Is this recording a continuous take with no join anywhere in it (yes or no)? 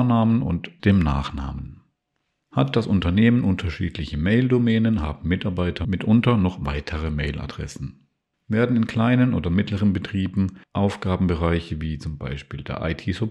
yes